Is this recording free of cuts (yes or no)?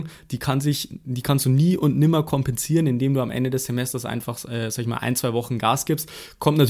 yes